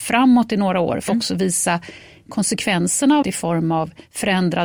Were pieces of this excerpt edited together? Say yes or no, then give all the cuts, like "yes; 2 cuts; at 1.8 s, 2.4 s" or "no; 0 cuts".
yes; 2 cuts; at 1.1 s, 3.2 s